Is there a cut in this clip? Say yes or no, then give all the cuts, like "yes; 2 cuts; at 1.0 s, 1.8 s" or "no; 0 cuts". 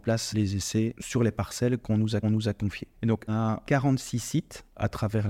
yes; 2 cuts; at 2.2 s, 3.3 s